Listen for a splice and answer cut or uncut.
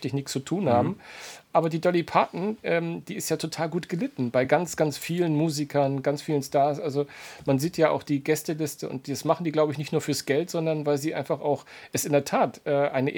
uncut